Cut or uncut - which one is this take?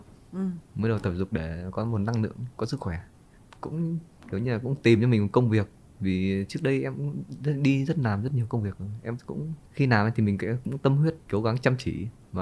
uncut